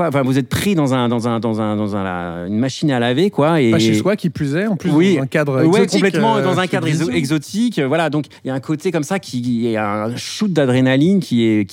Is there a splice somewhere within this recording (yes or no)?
yes